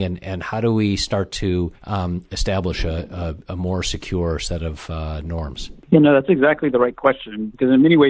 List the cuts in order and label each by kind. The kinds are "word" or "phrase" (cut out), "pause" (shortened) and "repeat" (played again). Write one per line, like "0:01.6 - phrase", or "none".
0:01.7 - pause
0:05.8 - pause